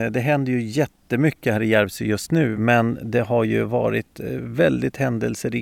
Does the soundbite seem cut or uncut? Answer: uncut